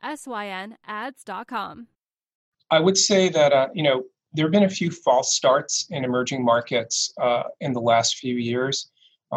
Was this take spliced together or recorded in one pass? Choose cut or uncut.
uncut